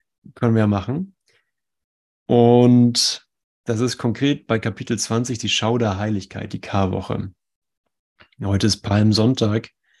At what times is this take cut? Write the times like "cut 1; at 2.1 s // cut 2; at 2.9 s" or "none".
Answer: cut 1; at 3.4 s